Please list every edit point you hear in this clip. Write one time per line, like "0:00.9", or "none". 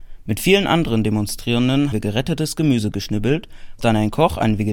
0:01.9
0:03.8